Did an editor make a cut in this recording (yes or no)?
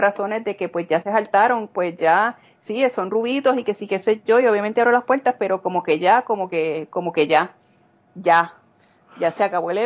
no